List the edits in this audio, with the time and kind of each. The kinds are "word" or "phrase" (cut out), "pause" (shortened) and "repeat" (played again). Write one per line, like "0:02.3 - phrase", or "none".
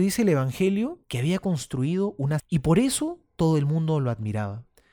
0:01.0 - pause
0:02.4 - word